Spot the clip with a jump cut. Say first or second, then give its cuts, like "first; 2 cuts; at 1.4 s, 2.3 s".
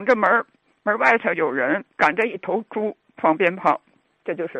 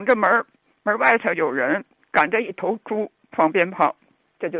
first; 1 cut; at 1.9 s